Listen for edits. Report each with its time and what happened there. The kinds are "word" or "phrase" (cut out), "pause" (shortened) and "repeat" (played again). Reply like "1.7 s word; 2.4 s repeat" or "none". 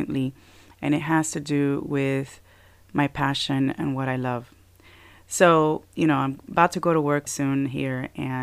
7.3 s word